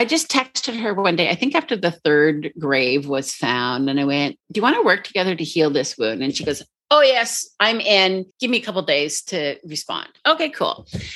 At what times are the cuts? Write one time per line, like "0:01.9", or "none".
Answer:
0:04.4
0:08.3
0:10.2